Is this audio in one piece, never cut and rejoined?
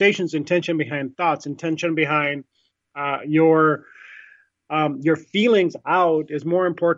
yes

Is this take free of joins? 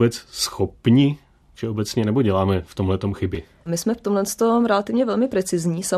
yes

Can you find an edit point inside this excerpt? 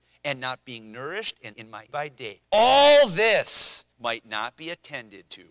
yes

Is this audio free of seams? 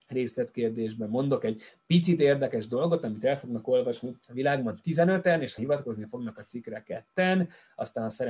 no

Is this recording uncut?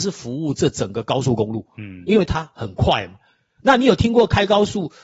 yes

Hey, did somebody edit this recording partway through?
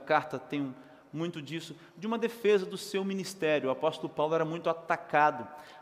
no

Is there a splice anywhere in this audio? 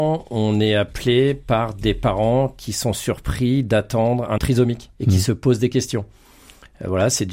yes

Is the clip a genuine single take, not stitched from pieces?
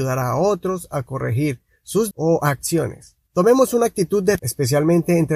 no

